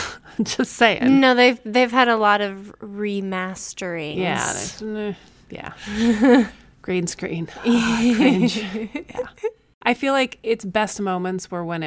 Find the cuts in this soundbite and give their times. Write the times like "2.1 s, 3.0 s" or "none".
none